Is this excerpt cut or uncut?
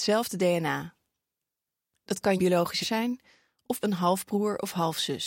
cut